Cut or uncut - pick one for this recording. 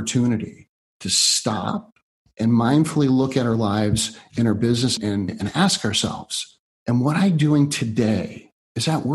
cut